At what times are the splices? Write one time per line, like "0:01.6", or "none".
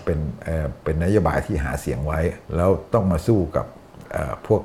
0:02.4